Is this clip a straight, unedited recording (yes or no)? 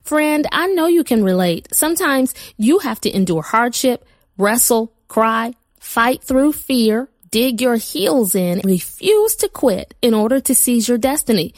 no